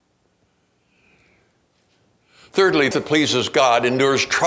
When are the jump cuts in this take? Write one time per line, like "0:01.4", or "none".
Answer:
0:02.9

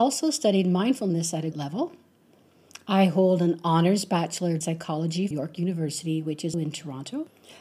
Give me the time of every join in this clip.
0:01.5
0:04.6
0:05.3
0:06.5

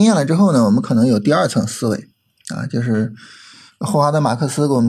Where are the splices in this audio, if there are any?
none

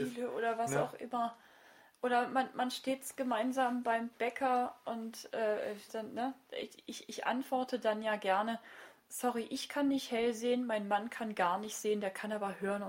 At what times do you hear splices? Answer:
0:05.9

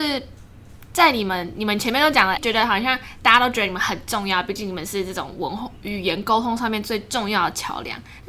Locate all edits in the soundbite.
0:02.4

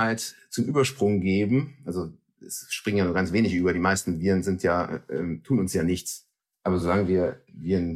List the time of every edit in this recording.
none

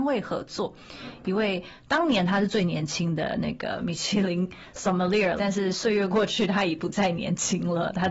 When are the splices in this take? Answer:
0:05.4

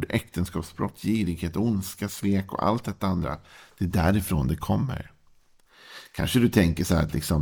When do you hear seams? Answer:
none

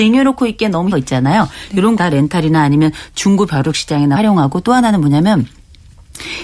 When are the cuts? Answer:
0:00.9
0:02.0
0:04.2

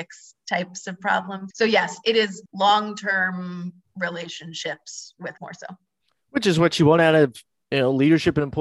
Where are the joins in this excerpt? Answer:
0:01.5
0:02.5
0:05.4

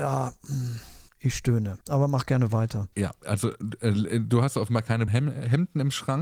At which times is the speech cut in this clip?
0:01.1
0:01.8
0:02.9
0:05.1

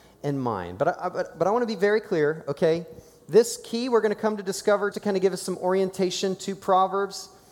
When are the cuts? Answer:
0:04.9

